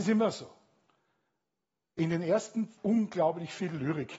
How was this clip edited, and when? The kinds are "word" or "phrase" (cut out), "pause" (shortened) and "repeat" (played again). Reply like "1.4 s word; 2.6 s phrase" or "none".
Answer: 2.8 s word